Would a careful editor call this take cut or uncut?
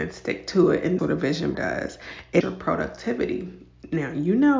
cut